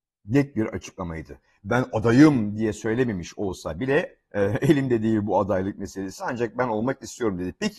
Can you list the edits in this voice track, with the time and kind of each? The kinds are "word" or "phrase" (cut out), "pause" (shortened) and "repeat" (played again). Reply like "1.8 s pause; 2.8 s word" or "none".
none